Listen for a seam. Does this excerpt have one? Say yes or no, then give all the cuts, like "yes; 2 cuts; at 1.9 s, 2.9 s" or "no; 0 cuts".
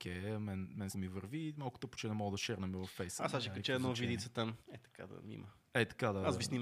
yes; 2 cuts; at 0.9 s, 4.6 s